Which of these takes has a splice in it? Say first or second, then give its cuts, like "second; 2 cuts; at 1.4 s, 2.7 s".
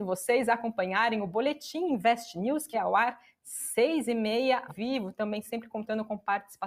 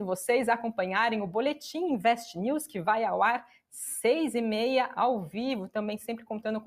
first; 2 cuts; at 2.7 s, 4.7 s